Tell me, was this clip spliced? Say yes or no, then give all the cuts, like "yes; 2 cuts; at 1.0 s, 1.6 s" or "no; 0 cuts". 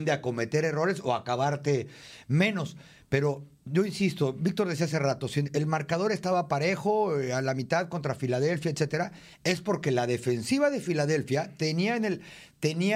no; 0 cuts